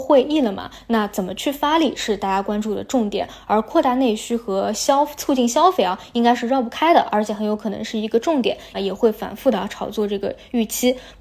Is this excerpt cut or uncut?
cut